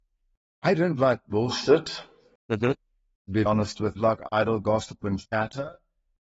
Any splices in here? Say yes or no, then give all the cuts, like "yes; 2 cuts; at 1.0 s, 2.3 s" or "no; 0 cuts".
yes; 2 cuts; at 3.5 s, 4.0 s